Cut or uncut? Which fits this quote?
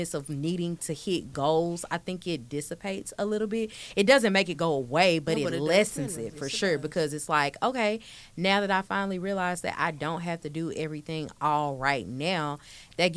uncut